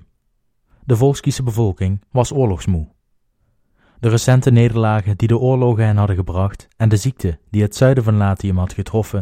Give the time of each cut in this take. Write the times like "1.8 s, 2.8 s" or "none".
none